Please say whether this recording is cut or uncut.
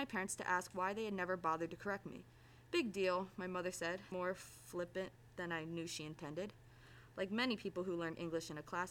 cut